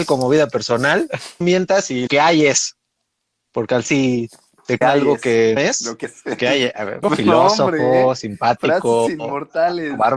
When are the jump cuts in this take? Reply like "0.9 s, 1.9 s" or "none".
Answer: 1.4 s, 2.1 s, 3.8 s, 4.8 s, 5.6 s, 6.0 s, 6.4 s, 7.0 s